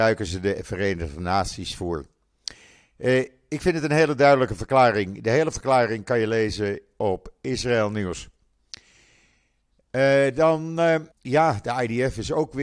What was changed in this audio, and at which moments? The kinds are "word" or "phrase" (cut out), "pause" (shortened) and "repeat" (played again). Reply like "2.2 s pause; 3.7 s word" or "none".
11.1 s pause